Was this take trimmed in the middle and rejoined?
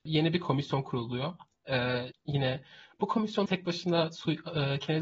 yes; 2 cuts; at 2.1 s, 3.5 s

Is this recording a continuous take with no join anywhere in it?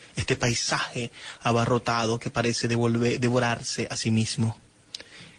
yes; 0 cuts

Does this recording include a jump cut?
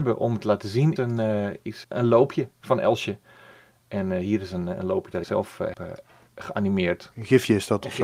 yes; 4 cuts; at 1.0 s, 1.8 s, 5.2 s, 5.7 s

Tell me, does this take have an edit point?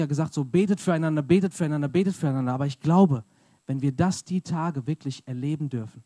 no; 0 cuts

